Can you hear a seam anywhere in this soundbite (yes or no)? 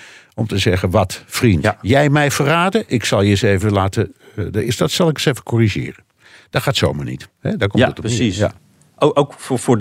no